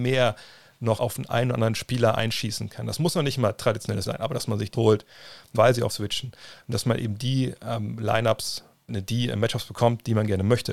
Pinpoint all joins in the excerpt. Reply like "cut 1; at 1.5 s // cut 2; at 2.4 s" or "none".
cut 1; at 1.0 s // cut 2; at 4.0 s // cut 3; at 4.7 s // cut 4; at 5.5 s // cut 5; at 5.9 s // cut 6; at 6.7 s // cut 7; at 8.9 s